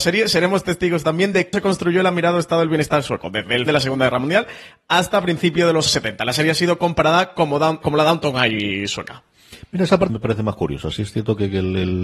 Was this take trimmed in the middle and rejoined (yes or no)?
yes